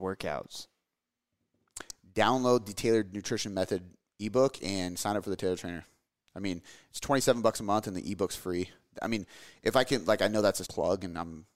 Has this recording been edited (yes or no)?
yes